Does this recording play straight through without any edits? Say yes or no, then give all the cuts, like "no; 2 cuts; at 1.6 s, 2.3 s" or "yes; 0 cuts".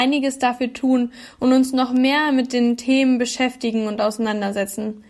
yes; 0 cuts